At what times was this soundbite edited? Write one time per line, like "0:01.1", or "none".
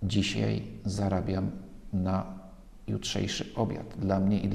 none